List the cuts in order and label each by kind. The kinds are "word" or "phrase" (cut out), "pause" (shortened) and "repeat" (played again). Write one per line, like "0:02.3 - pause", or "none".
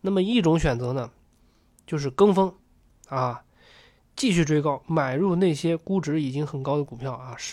none